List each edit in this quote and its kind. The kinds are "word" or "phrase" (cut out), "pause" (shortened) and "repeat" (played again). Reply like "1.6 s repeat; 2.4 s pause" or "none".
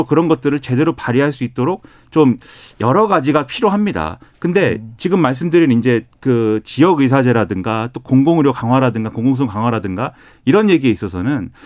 none